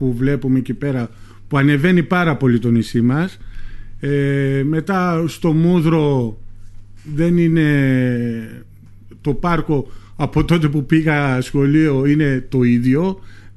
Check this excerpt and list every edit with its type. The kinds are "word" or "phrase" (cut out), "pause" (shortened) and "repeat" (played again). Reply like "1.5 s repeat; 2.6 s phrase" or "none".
none